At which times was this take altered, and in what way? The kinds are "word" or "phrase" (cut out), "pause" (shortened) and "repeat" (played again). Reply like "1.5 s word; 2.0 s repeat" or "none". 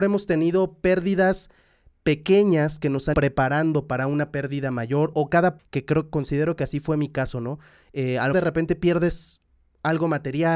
3.1 s word; 5.1 s word; 5.6 s word; 8.3 s word

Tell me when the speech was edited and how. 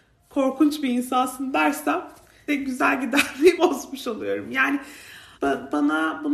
2.5 s word; 3.6 s word; 5.3 s word

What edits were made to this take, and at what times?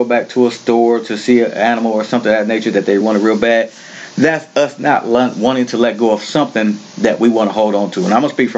3.0 s word

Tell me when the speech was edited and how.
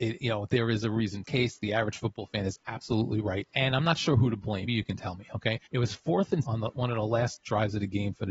1.2 s phrase; 3.5 s pause; 4.7 s word; 5.7 s pause; 6.4 s word

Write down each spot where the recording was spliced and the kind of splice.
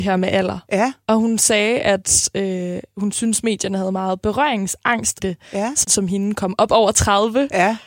5.2 s word; 5.8 s phrase

